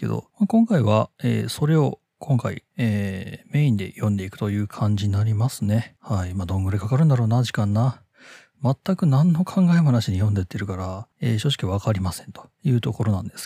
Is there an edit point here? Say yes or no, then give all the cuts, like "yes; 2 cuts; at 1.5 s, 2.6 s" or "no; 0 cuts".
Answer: no; 0 cuts